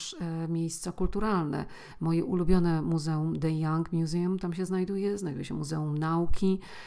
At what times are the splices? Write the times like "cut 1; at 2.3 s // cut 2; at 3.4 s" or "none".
none

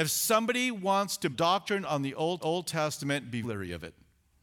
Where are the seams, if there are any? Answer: cut 1; at 1.3 s // cut 2; at 2.4 s // cut 3; at 3.4 s

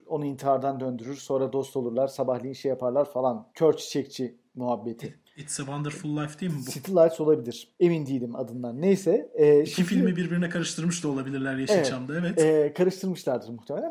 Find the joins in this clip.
cut 1; at 3.5 s // cut 2; at 7.7 s

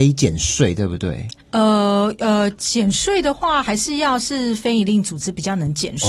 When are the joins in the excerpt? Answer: cut 1; at 1.4 s

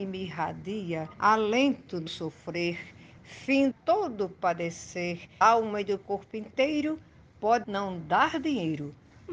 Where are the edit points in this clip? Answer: cut 1; at 1.1 s // cut 2; at 2.1 s // cut 3; at 3.7 s // cut 4; at 5.4 s // cut 5; at 6.0 s // cut 6; at 7.6 s

